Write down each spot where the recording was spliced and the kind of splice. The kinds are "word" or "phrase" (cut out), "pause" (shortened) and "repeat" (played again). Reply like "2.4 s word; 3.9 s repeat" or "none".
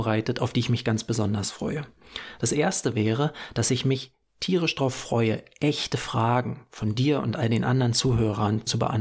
none